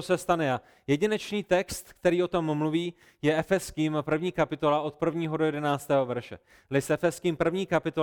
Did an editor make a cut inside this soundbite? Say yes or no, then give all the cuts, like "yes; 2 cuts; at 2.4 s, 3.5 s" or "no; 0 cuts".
no; 0 cuts